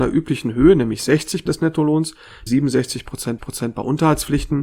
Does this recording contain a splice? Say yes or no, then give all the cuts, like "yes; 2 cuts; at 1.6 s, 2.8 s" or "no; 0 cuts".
yes; 3 cuts; at 1.5 s, 2.5 s, 3.4 s